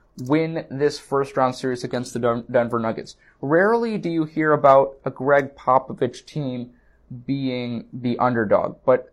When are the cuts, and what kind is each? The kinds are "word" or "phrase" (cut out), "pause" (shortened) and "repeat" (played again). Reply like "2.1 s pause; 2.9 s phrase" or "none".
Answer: none